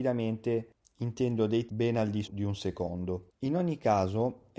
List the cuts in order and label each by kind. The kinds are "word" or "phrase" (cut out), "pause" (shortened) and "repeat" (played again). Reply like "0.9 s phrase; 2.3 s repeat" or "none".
1.7 s word; 2.2 s word